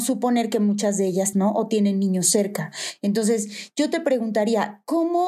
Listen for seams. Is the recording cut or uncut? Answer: cut